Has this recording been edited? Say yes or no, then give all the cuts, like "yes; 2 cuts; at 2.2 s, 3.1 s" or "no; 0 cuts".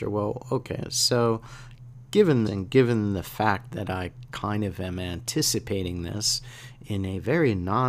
yes; 1 cut; at 2.5 s